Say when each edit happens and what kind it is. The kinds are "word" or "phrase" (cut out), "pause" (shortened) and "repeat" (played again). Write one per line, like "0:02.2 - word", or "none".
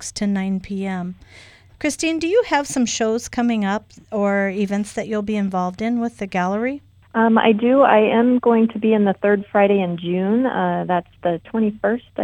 none

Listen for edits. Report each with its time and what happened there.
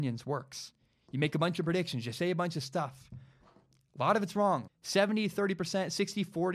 0:04.7 - word

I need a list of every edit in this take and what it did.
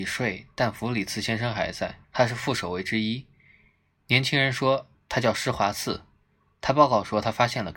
0:02.0 - pause

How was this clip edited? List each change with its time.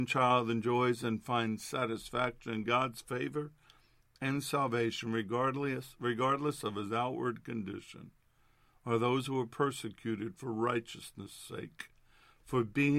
none

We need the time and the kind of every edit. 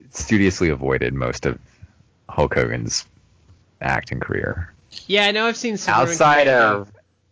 none

